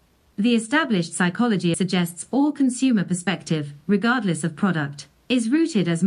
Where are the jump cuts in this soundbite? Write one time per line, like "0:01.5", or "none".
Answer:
0:01.7